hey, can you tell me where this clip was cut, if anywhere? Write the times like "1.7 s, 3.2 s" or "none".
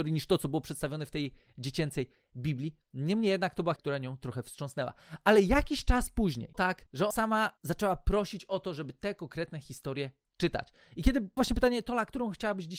3.8 s, 6.5 s, 7.1 s, 11.4 s

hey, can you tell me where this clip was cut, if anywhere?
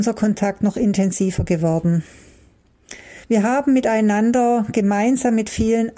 3.2 s

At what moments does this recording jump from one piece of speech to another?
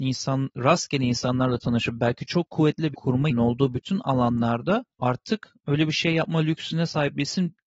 2.9 s, 3.3 s

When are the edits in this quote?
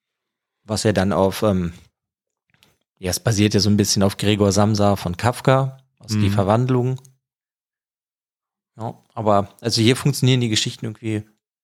none

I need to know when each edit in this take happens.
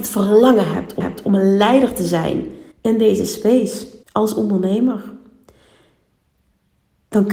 1.0 s, 2.7 s, 4.0 s

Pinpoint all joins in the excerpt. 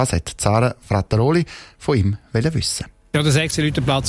none

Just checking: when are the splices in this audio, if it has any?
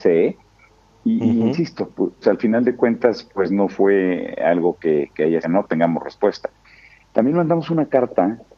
2.2 s, 5.4 s

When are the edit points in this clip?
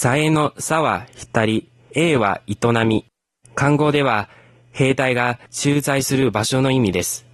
none

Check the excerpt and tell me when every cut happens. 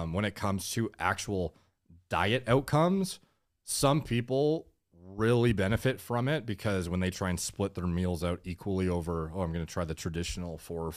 none

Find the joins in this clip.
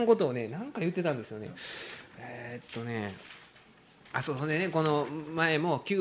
none

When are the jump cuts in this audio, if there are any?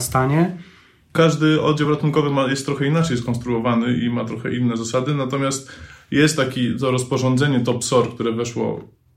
none

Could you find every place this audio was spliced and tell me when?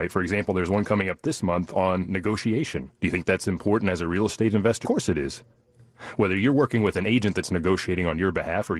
3.0 s, 4.8 s

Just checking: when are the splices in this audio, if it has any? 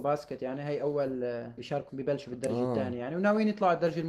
1.6 s, 1.9 s

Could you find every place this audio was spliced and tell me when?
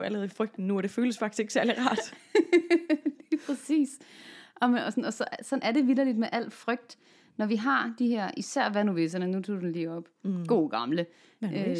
none

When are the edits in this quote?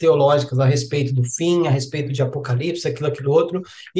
none

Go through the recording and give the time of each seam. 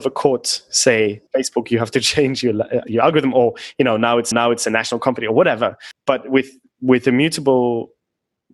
1.3 s, 4.3 s

